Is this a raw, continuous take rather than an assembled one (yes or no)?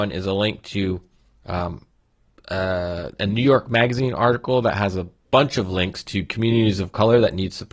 yes